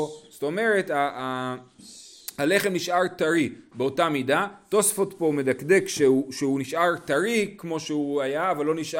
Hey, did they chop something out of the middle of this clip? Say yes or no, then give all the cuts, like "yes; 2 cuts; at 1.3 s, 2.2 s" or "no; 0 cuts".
no; 0 cuts